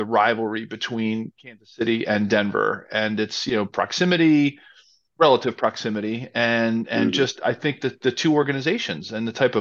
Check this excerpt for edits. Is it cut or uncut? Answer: uncut